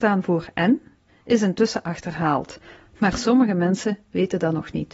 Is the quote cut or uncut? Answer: uncut